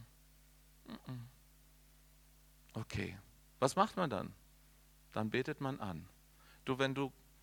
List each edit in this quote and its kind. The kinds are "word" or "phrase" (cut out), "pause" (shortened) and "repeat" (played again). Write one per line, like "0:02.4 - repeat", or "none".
none